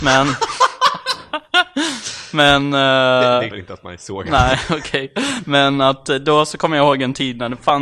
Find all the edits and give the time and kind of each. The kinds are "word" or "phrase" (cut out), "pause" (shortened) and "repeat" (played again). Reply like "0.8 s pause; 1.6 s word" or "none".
3.5 s word